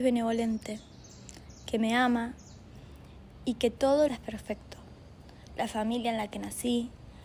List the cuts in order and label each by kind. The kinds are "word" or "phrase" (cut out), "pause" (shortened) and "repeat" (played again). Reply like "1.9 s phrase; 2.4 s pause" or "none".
4.1 s phrase